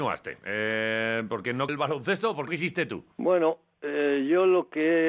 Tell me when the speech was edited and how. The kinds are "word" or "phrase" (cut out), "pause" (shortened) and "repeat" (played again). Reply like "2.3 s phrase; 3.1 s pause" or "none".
1.7 s word; 2.5 s word; 3.1 s pause